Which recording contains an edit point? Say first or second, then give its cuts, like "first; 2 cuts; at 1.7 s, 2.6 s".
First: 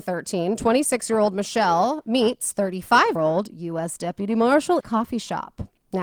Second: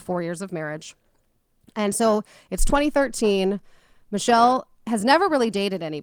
first; 2 cuts; at 3.2 s, 4.8 s